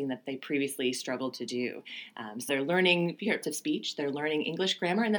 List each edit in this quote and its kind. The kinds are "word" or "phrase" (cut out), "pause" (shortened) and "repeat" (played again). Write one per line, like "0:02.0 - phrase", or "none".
0:02.5 - word
0:03.4 - word